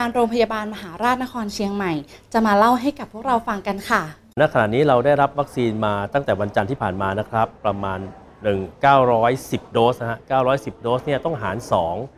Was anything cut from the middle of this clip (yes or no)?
yes